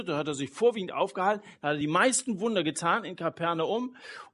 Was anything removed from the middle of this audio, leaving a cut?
no; 0 cuts

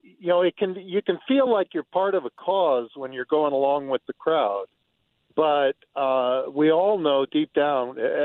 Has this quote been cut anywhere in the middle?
no; 0 cuts

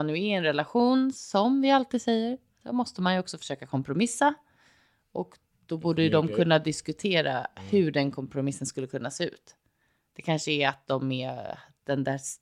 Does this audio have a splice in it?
no; 0 cuts

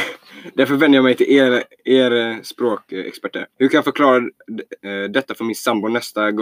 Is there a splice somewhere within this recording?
yes; 1 cut; at 3.5 s

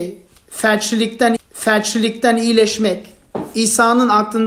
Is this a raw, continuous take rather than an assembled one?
no; 1 cut; at 1.4 s

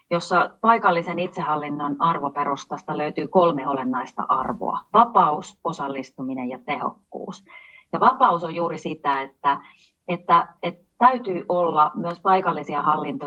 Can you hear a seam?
no; 0 cuts

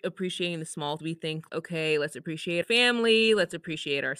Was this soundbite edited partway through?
yes; 3 cuts; at 1.0 s, 1.5 s, 2.6 s

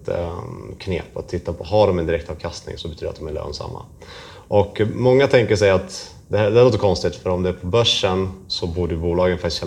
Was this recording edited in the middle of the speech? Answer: yes; 1 cut; at 2.8 s

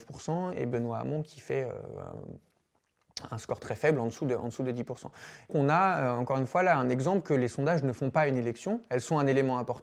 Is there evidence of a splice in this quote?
yes; 1 cut; at 5.5 s

